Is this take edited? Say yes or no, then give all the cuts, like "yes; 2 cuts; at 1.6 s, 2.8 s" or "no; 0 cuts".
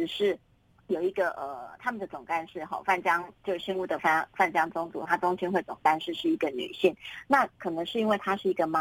no; 0 cuts